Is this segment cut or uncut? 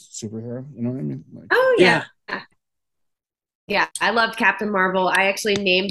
cut